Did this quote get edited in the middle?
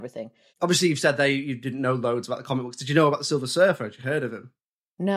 no; 0 cuts

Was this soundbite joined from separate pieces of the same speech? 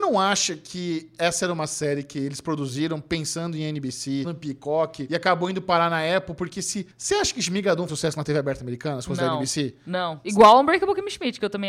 yes; 3 cuts; at 4.2 s, 6.9 s, 7.9 s

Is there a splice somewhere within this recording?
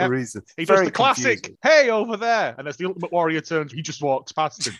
yes; 1 cut; at 3.7 s

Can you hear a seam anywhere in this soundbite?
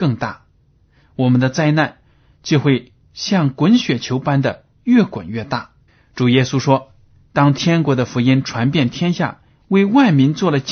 yes; 2 cuts; at 3.0 s, 5.9 s

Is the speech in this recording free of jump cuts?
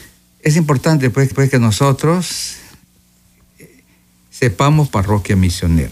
no; 2 cuts; at 1.3 s, 4.9 s

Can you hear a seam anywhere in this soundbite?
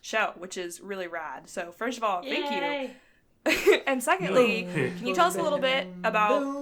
no; 0 cuts

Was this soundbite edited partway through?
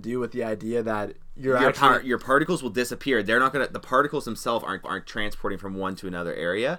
yes; 1 cut; at 4.8 s

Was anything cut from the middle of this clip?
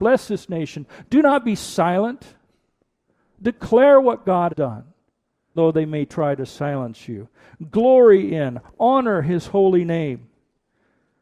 yes; 2 cuts; at 4.5 s, 5.6 s

